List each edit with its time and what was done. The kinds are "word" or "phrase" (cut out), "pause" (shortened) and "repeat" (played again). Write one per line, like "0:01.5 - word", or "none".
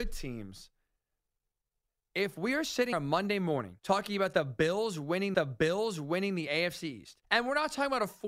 0:02.9 - word
0:03.8 - pause
0:05.3 - repeat
0:07.2 - pause